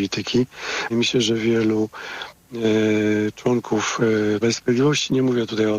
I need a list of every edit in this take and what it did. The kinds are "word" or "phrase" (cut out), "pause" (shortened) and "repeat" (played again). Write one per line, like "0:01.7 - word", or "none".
0:00.9 - word
0:04.4 - word